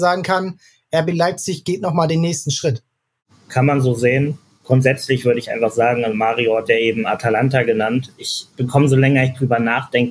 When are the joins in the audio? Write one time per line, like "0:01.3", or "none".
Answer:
none